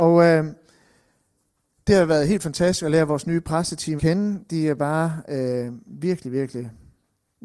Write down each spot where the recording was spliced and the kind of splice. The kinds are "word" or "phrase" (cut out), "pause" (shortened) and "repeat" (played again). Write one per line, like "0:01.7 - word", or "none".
0:04.0 - word